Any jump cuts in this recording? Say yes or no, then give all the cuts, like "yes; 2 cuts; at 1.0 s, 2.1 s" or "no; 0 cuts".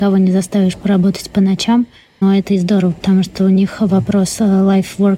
no; 0 cuts